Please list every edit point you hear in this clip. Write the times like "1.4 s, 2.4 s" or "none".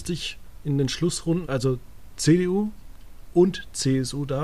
1.4 s